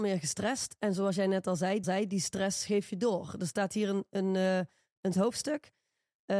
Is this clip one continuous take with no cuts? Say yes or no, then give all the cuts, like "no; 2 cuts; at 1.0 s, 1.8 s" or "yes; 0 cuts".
no; 2 cuts; at 1.8 s, 5.1 s